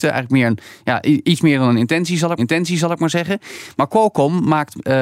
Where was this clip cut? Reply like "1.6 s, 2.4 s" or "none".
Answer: 2.4 s